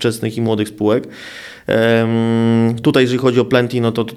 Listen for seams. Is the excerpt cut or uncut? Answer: uncut